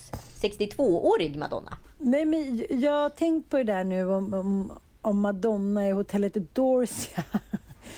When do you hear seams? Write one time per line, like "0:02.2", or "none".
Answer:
none